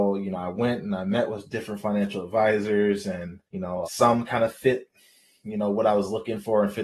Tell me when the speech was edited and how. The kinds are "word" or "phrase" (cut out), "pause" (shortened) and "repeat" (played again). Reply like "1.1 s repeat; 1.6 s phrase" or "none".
3.5 s pause; 3.8 s word